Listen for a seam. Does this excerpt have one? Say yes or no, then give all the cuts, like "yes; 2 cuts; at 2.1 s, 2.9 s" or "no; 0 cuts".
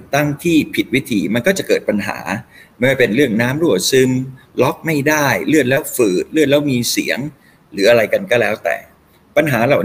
no; 0 cuts